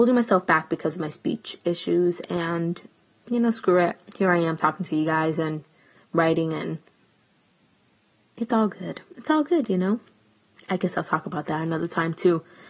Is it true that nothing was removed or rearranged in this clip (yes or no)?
yes